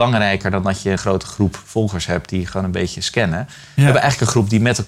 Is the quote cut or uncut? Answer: cut